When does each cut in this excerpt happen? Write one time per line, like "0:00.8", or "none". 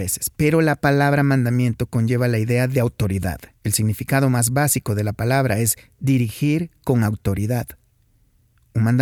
0:03.5